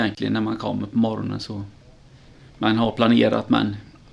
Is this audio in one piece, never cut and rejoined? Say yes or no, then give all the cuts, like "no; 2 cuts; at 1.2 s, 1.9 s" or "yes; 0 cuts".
yes; 0 cuts